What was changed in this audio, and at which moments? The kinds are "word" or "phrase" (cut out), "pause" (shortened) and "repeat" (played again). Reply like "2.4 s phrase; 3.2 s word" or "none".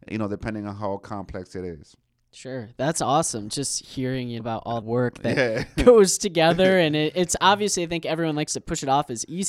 4.4 s word; 4.8 s word